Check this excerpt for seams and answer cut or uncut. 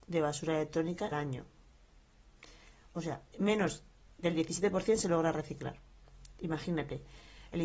cut